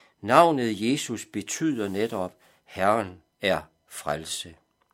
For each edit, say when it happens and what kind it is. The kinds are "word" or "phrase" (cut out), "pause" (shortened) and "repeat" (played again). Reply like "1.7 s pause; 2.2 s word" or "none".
3.3 s pause